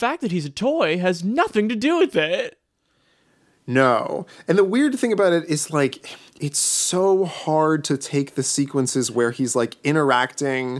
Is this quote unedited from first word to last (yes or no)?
yes